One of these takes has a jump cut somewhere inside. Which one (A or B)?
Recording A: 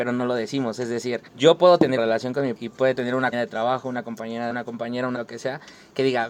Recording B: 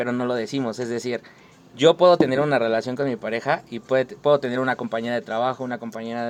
A